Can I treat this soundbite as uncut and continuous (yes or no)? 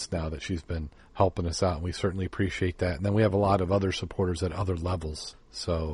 yes